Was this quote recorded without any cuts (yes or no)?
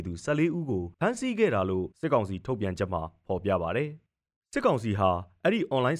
no